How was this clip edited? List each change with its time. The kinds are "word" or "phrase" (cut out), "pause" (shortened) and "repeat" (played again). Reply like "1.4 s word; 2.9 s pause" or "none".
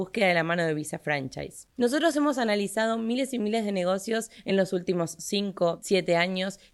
none